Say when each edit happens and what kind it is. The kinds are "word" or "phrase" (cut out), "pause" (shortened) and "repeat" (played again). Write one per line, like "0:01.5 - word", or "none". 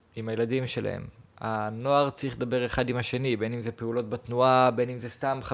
none